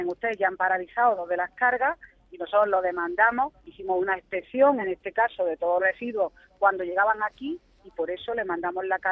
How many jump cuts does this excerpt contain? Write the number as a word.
two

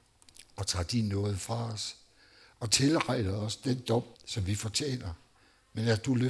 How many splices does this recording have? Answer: one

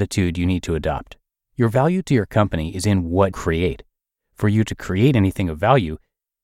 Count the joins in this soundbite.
one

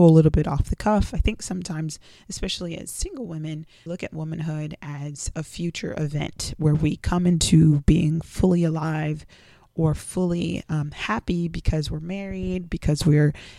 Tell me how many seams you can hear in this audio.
one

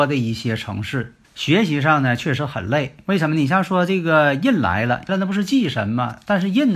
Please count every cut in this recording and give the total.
two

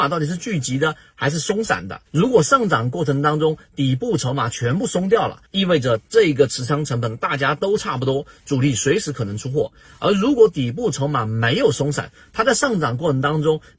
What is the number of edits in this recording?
two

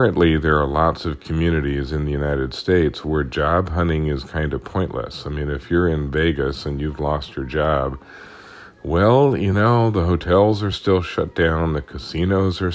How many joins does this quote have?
zero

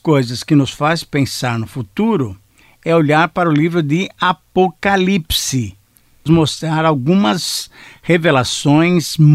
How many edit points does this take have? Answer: one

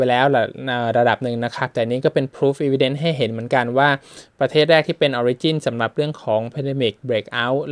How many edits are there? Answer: zero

